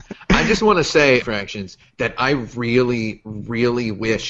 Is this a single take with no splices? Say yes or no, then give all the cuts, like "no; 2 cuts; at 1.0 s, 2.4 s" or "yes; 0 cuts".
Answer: no; 1 cut; at 1.2 s